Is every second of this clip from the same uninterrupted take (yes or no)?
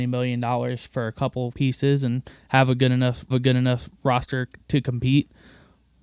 no